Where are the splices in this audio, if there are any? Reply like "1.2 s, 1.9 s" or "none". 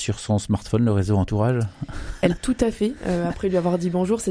2.4 s

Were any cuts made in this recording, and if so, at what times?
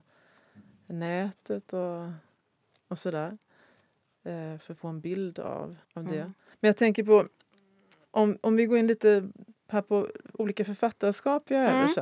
5.8 s, 6.4 s

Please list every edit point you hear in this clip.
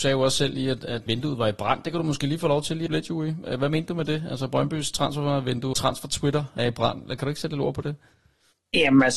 1.1 s, 2.9 s, 5.7 s, 6.6 s

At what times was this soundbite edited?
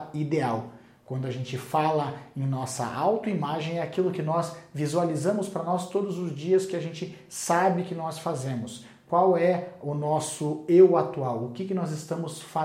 none

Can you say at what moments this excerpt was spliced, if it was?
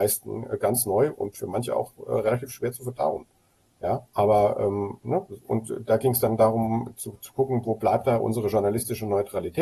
4.1 s

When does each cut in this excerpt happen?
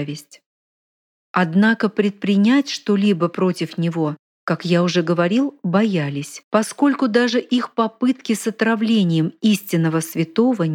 6.4 s

